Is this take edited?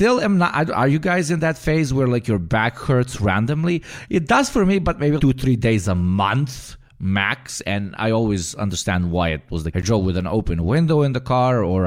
yes; 2 cuts; at 5.2 s, 9.7 s

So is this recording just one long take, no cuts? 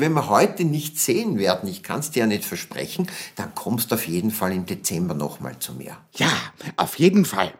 yes; 0 cuts

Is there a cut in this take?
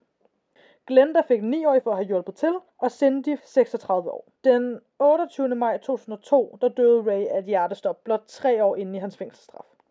yes; 4 cuts; at 1.8 s, 2.7 s, 3.4 s, 4.4 s

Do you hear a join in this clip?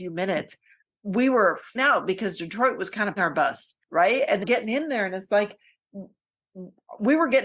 yes; 4 cuts; at 1.8 s, 3.2 s, 3.8 s, 4.4 s

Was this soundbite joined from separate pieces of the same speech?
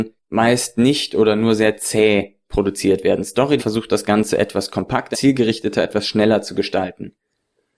yes; 2 cuts; at 3.6 s, 5.1 s

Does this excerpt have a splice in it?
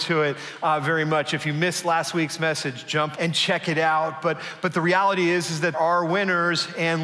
yes; 2 cuts; at 3.1 s, 5.7 s

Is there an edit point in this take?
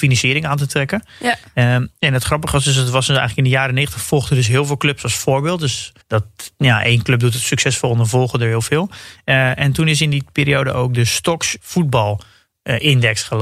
yes; 2 cuts; at 6.0 s, 11.6 s

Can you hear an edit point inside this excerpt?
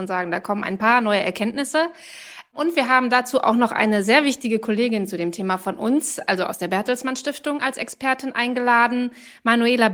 no; 0 cuts

